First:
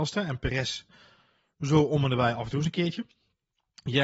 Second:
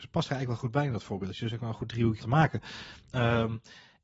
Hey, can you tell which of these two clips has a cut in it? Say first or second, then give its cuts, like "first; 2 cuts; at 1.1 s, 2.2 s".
second; 1 cut; at 2.2 s